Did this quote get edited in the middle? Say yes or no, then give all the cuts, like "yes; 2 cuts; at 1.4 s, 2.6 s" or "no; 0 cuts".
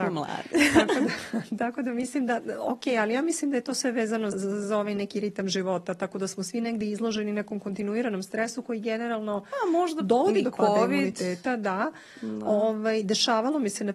yes; 1 cut; at 4.3 s